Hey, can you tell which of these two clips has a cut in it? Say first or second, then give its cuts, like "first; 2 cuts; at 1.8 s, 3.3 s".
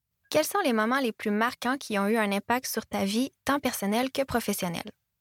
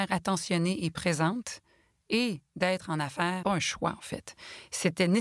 second; 1 cut; at 3.4 s